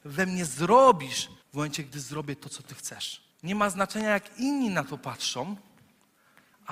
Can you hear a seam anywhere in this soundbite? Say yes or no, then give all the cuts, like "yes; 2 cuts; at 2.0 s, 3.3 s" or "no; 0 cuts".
yes; 2 cuts; at 1.4 s, 3.3 s